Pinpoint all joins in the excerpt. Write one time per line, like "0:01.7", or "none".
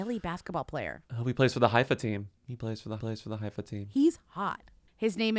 0:01.1
0:02.4
0:03.0

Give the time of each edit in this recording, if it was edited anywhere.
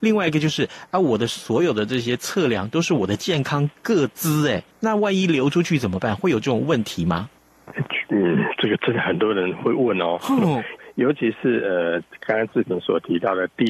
0:04.7
0:10.8

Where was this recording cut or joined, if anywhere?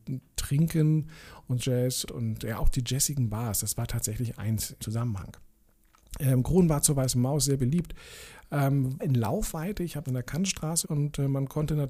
0:01.6
0:02.1
0:04.8
0:09.0
0:10.1
0:10.8

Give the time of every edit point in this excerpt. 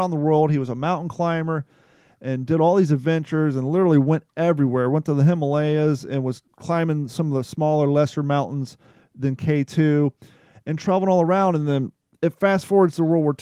none

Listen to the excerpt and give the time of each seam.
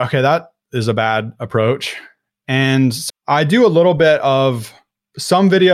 0:03.1

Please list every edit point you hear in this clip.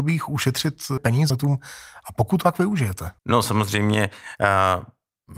0:01.0
0:01.3
0:02.4
0:03.2

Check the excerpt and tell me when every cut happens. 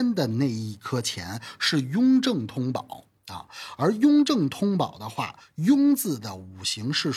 none

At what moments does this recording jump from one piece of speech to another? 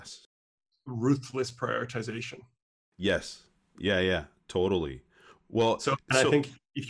none

